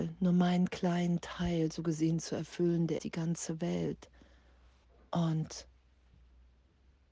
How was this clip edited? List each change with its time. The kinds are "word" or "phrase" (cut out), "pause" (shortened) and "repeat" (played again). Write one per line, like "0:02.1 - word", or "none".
0:03.0 - word
0:04.8 - pause